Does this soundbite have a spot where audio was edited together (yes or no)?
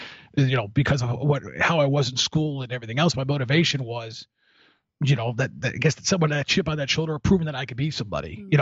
no